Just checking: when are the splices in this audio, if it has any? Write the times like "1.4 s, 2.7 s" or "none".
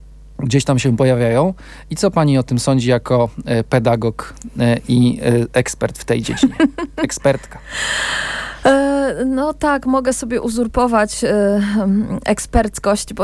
none

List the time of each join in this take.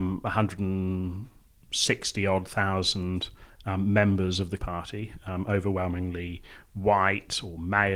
4.6 s

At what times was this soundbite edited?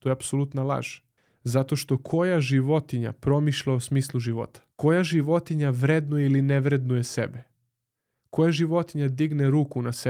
1.2 s, 4.7 s

